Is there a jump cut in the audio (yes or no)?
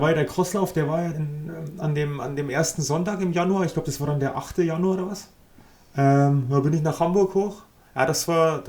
yes